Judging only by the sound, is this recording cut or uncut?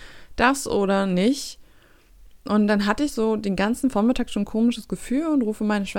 uncut